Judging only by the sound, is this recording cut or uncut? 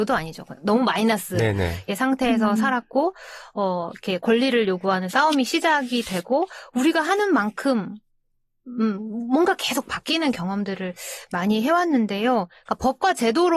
uncut